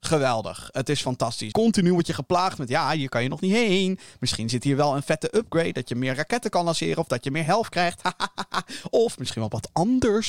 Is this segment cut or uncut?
cut